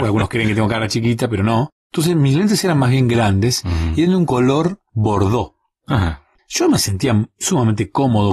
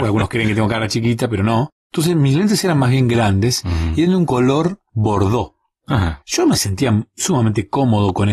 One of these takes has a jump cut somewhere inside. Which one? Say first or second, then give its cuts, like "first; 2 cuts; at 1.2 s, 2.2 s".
second; 1 cut; at 6.2 s